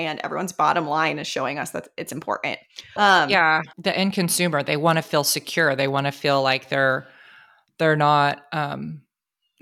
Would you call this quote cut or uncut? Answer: cut